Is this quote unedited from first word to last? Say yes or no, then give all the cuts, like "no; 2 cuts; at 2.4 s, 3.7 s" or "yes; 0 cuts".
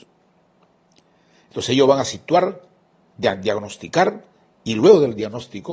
yes; 0 cuts